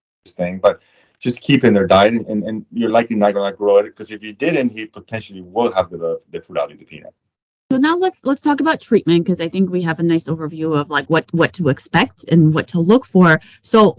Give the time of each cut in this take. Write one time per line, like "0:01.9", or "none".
0:07.3